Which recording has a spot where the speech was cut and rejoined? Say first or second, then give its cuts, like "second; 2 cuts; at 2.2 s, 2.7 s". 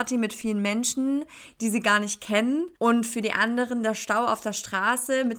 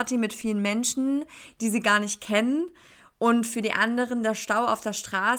first; 1 cut; at 2.7 s